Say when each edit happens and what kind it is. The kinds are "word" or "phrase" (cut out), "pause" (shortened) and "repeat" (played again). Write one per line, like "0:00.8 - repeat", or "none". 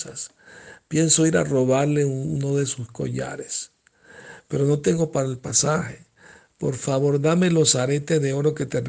none